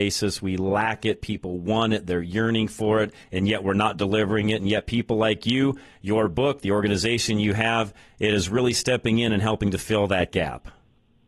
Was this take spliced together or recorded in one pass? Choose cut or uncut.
cut